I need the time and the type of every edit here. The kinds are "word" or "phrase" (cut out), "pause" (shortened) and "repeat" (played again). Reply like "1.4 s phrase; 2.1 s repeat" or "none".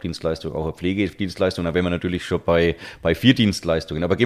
none